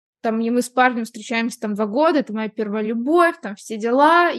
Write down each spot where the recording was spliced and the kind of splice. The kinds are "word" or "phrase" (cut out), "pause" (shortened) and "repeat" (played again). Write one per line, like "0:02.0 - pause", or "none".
none